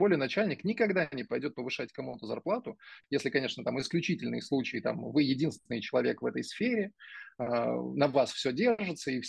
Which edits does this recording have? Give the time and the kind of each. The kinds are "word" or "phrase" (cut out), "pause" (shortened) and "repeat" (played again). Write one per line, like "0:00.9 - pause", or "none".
none